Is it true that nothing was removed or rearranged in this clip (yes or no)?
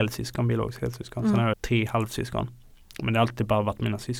no